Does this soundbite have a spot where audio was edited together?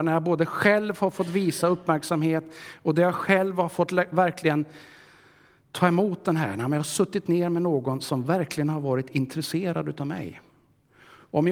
no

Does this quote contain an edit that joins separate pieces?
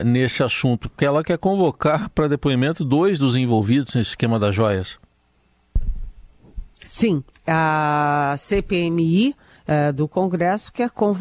yes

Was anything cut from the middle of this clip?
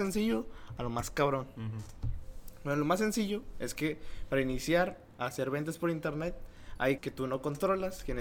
yes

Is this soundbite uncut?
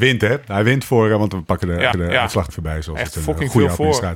no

